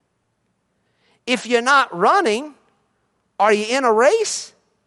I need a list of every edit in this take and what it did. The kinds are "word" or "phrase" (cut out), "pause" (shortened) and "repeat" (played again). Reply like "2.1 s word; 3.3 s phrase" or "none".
none